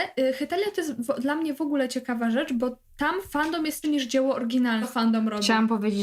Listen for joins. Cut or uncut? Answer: cut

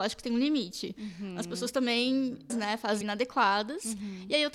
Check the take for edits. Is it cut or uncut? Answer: cut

